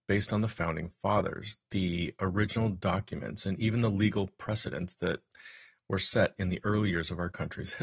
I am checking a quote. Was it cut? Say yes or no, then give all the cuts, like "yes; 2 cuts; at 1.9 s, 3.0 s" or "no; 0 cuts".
no; 0 cuts